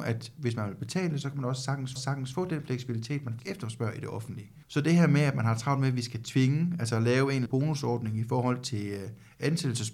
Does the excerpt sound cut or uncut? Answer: cut